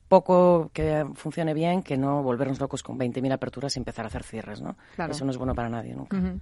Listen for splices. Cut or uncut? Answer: uncut